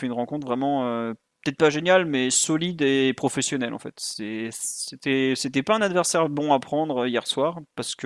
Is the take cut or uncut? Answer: uncut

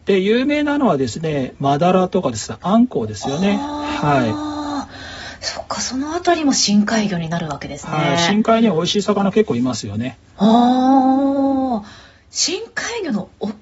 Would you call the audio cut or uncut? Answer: uncut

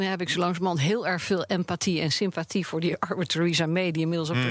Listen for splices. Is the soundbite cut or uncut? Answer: uncut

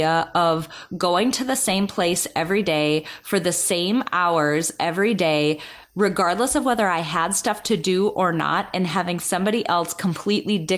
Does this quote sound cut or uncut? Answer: uncut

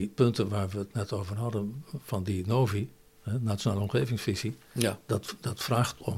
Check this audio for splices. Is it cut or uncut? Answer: uncut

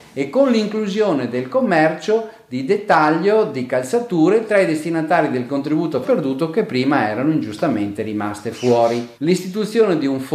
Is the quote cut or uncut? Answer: cut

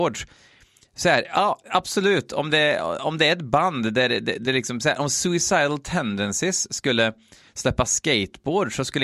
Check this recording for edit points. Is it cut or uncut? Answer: uncut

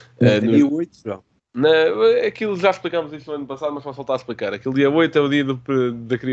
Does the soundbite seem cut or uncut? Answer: cut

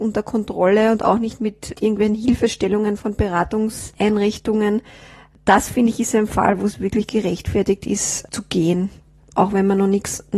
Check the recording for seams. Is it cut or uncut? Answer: uncut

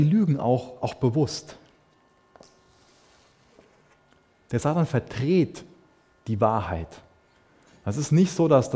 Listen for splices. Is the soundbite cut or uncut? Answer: uncut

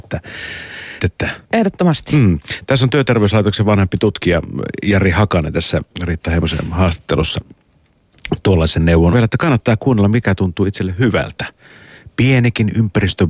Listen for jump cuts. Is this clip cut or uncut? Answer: cut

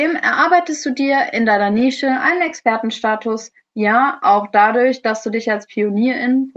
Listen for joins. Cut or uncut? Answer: uncut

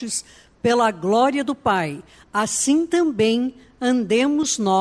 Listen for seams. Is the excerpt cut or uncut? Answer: uncut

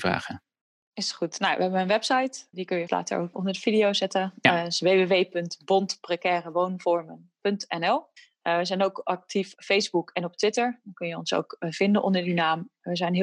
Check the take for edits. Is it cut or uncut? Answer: cut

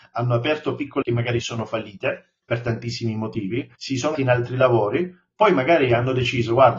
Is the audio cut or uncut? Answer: cut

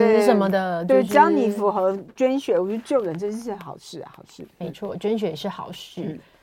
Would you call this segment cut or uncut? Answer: uncut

